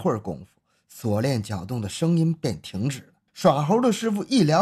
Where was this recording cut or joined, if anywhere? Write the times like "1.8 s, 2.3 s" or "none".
3.3 s